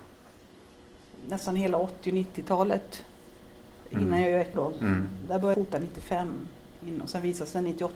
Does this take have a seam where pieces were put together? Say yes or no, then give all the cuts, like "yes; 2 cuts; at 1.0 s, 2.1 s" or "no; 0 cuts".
yes; 3 cuts; at 1.2 s, 4.5 s, 5.5 s